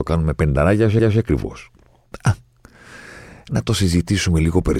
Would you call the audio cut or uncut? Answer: cut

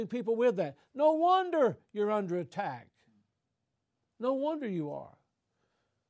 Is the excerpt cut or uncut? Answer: uncut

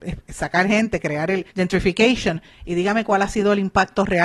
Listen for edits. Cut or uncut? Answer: cut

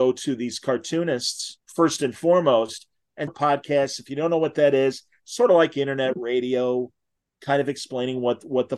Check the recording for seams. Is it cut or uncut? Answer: cut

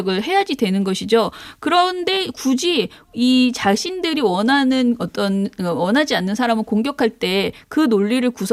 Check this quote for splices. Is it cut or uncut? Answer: uncut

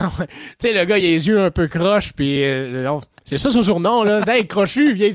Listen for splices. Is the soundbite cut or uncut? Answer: uncut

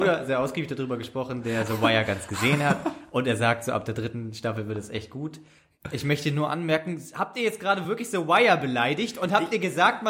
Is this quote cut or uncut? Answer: uncut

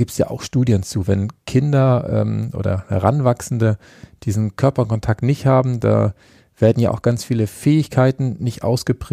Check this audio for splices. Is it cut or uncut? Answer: uncut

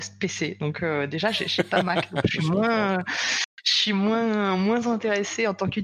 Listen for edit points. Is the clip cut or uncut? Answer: uncut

